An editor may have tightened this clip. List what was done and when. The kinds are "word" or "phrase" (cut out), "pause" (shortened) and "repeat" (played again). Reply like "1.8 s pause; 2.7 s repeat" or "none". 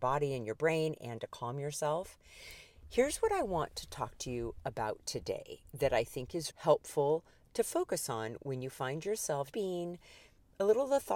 6.5 s word; 9.5 s word

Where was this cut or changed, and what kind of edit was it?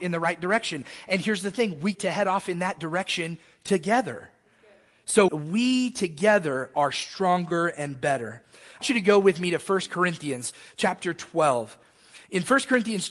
1.9 s word; 5.3 s word; 8.8 s word

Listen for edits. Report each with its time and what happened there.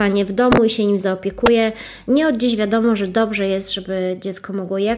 none

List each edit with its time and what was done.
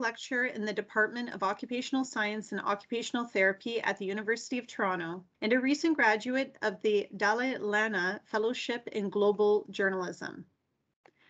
5.3 s pause

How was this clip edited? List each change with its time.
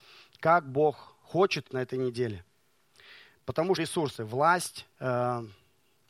1.7 s phrase; 3.8 s phrase; 4.9 s word

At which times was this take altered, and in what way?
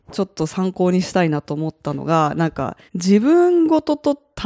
2.9 s pause

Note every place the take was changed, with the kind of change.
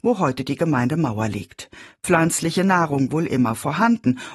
3.1 s word

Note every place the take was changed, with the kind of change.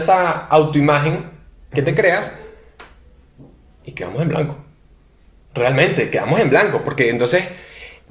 none

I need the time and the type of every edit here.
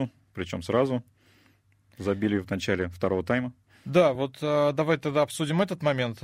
none

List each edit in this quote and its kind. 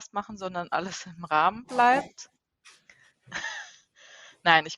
none

